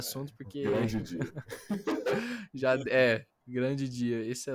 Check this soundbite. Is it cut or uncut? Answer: uncut